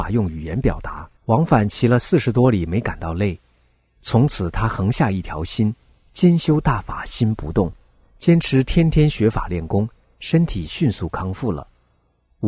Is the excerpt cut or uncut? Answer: cut